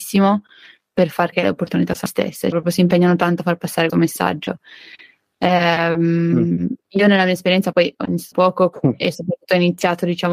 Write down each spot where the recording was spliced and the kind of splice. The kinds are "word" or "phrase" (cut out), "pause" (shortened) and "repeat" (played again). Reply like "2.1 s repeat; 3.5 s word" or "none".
1.3 s word; 2.1 s word; 2.5 s word; 3.9 s word; 7.7 s word; 8.3 s word